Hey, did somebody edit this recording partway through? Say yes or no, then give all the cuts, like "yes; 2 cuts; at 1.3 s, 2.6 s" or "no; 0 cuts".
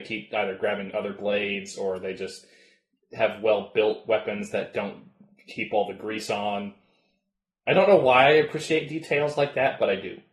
no; 0 cuts